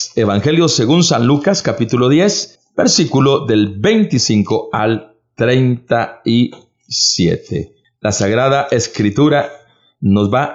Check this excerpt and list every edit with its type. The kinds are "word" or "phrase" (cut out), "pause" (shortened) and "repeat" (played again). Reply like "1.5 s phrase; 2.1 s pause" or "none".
none